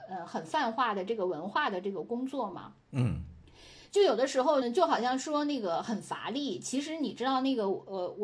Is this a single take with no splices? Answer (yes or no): no